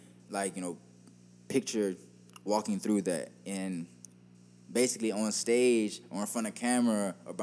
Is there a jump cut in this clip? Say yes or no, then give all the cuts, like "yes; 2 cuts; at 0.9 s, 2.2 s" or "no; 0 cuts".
no; 0 cuts